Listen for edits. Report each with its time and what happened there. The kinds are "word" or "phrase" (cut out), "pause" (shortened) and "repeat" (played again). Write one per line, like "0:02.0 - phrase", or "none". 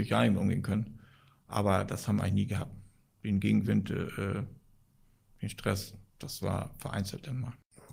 none